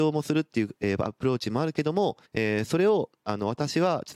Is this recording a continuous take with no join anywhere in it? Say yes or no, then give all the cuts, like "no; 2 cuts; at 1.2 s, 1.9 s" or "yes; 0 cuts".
no; 1 cut; at 2.2 s